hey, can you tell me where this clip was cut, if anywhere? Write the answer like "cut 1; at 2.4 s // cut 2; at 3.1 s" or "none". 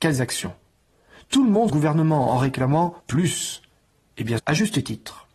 cut 1; at 1.7 s // cut 2; at 3.0 s // cut 3; at 4.4 s